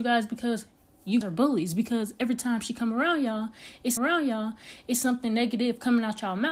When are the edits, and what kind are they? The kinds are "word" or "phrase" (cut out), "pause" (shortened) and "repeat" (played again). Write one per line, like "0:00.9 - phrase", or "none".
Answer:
0:01.2 - word
0:04.0 - repeat

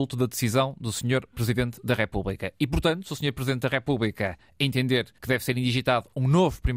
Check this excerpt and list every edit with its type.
0:05.2 - pause

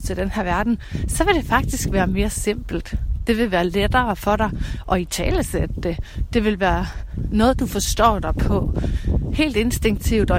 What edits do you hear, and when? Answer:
none

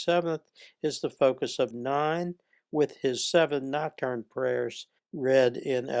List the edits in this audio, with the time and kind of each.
0:01.7 - word
0:05.0 - pause

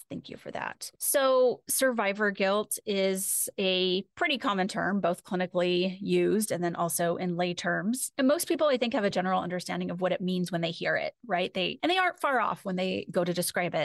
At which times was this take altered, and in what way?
none

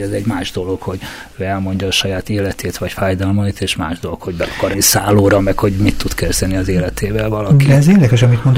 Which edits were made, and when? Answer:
0:04.7 - word

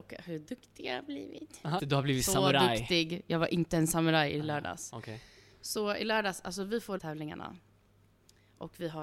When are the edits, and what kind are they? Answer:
0:01.8 - word
0:07.0 - phrase

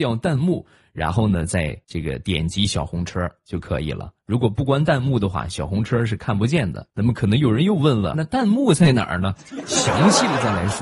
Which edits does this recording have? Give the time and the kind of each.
0:01.8 - pause
0:06.9 - pause
0:08.1 - word

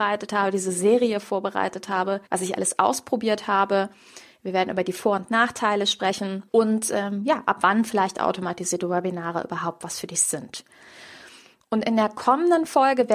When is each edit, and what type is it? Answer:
0:02.3 - pause
0:06.5 - pause

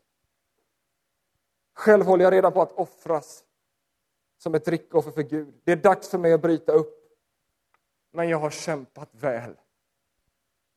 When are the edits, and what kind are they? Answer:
none

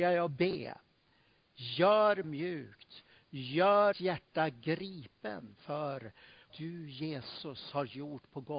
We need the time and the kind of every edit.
0:02.2 - phrase
0:03.9 - word
0:06.5 - word

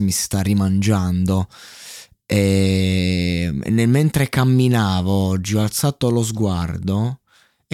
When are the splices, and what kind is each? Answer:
none

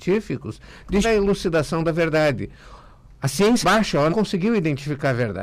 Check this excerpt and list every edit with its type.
0:01.0 - word
0:03.6 - word
0:04.1 - word

